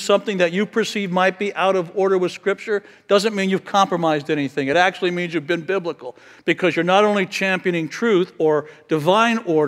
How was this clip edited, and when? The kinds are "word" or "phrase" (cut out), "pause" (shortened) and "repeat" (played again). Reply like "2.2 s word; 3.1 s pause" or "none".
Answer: none